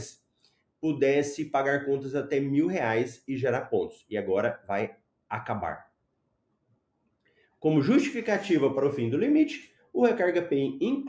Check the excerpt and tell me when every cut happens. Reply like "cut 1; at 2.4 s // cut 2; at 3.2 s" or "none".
none